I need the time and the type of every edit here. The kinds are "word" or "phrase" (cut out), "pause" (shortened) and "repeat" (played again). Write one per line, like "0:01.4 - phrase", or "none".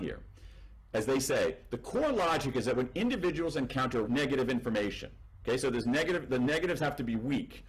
0:04.0 - word